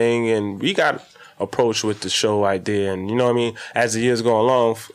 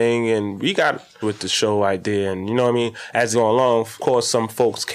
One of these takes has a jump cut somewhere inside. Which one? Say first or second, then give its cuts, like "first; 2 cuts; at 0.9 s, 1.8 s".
second; 3 cuts; at 1.2 s, 3.3 s, 4.0 s